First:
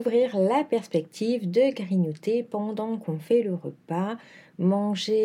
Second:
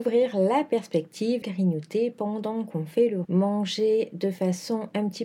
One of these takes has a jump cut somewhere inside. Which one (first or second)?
second